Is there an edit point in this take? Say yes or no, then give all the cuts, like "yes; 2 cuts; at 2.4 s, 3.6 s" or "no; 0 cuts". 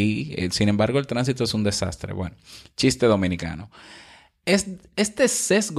no; 0 cuts